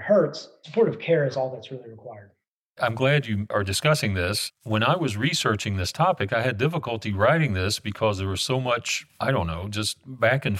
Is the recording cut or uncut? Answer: cut